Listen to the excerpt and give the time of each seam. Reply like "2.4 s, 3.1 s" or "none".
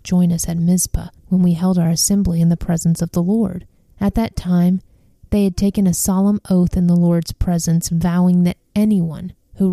1.2 s, 3.8 s